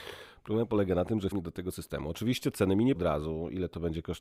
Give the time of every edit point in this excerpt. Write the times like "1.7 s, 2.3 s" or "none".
1.3 s, 1.7 s, 2.9 s